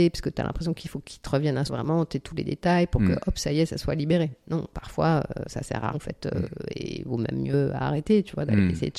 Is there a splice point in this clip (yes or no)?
yes